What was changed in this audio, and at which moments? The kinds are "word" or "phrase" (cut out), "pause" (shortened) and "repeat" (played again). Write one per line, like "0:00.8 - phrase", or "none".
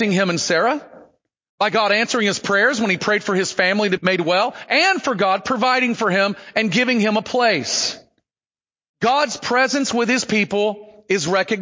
0:04.0 - word